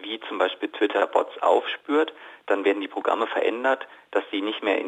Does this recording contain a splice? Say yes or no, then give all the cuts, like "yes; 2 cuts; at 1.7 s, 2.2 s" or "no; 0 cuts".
no; 0 cuts